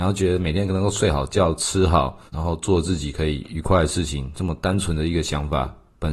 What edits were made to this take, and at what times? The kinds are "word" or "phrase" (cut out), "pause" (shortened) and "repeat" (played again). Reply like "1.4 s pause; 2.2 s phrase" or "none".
2.3 s pause